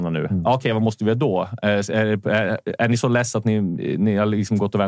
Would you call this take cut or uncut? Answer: uncut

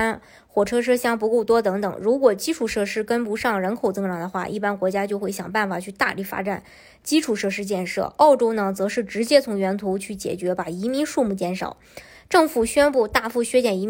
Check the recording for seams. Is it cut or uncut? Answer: uncut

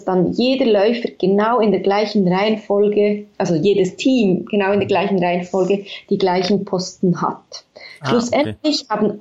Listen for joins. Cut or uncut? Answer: uncut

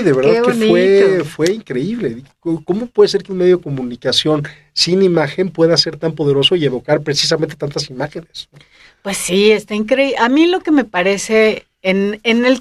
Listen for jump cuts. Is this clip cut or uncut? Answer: uncut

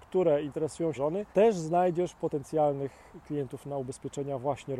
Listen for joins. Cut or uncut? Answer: cut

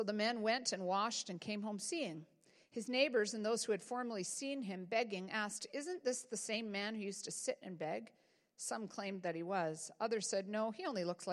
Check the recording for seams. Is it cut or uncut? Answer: uncut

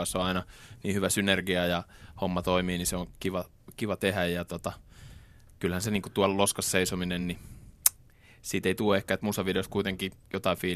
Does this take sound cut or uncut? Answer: uncut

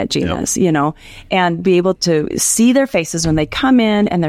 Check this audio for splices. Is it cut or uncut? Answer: cut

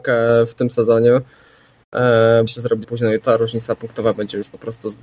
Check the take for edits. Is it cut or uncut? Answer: cut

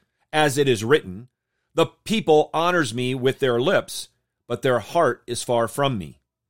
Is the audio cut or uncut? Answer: uncut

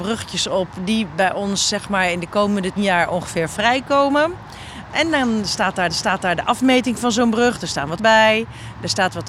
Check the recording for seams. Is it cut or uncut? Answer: cut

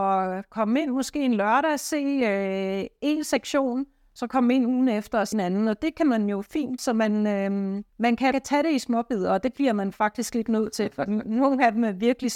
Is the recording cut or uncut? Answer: cut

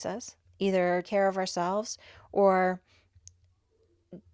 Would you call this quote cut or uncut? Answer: cut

